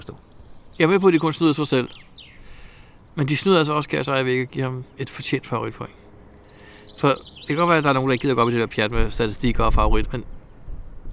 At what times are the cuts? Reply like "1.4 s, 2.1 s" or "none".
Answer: 10.1 s

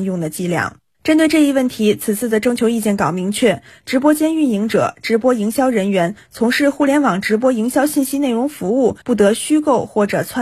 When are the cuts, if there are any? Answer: 9.0 s

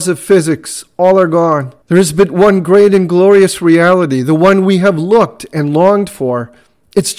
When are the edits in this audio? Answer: 1.8 s

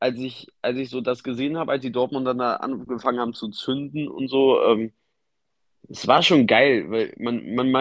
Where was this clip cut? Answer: none

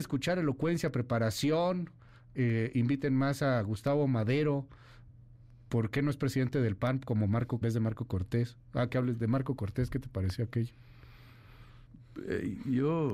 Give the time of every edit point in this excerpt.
7.6 s

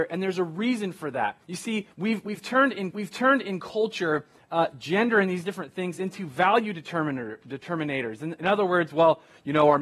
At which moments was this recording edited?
1.4 s, 1.9 s, 2.9 s

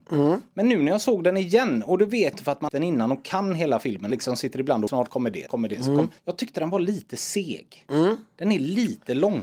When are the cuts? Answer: 2.3 s, 2.7 s, 4.1 s, 4.9 s, 5.5 s, 6.2 s

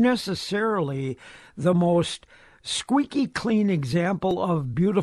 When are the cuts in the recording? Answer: none

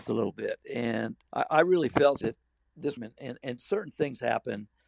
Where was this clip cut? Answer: 1.2 s, 2.2 s, 3.0 s

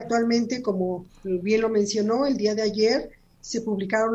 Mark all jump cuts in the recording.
none

